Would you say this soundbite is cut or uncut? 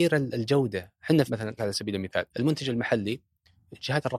cut